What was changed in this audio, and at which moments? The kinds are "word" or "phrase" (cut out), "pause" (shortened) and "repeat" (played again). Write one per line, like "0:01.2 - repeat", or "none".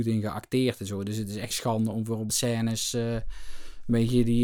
0:01.5 - word
0:02.3 - word

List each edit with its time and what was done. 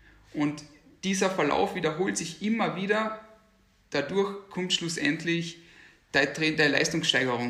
none

